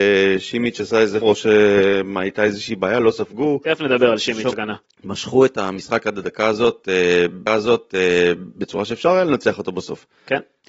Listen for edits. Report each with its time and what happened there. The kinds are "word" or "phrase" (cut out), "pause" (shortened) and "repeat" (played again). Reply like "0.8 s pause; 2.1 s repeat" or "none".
1.2 s word; 4.5 s word; 4.9 s pause; 7.5 s repeat